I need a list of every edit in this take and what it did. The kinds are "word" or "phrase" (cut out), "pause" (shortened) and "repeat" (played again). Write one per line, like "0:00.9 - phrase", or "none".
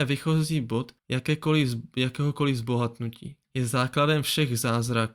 0:01.0 - pause
0:03.4 - pause